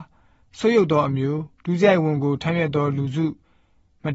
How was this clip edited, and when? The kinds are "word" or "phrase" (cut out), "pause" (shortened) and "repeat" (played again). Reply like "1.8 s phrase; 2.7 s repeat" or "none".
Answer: 1.5 s pause